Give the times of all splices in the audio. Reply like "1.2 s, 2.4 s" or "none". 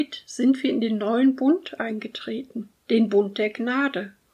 2.8 s